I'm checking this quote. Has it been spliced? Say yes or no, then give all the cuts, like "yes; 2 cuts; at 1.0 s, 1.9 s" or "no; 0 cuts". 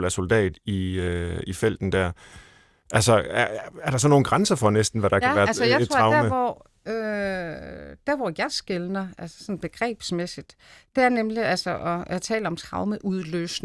no; 0 cuts